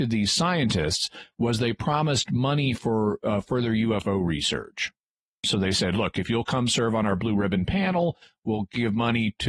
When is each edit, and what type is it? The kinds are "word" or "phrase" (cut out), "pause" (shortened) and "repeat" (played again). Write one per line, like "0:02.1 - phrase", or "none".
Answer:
none